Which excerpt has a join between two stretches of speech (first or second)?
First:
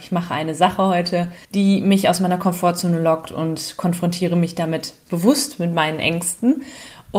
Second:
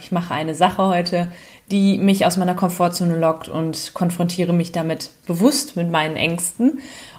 first